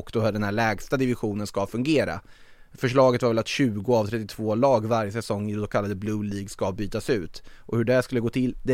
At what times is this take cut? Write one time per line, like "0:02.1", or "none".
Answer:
none